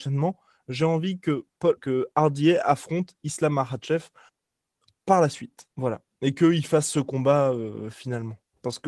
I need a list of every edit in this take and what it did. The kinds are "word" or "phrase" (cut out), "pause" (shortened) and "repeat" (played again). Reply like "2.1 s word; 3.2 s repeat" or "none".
1.8 s word; 4.3 s pause; 5.7 s pause